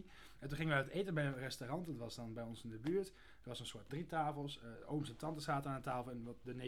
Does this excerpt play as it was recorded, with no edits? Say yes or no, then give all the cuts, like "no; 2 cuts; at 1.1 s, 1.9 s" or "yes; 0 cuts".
no; 2 cuts; at 3.9 s, 4.7 s